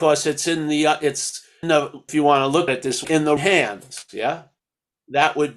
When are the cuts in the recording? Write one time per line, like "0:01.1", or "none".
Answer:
0:01.6
0:02.1
0:02.7
0:03.0
0:03.4